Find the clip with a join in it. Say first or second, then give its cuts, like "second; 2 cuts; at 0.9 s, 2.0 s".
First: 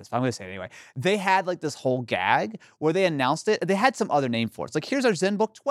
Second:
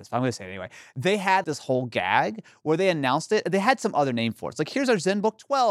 second; 1 cut; at 1.4 s